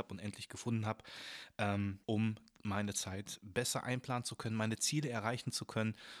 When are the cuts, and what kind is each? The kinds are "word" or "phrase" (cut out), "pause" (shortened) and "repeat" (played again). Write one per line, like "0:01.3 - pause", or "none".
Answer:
0:02.0 - pause